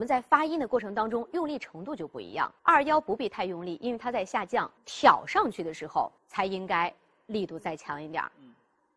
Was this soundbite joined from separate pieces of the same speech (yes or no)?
yes